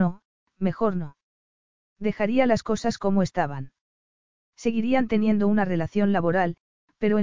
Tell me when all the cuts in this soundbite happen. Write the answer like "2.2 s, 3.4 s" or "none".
none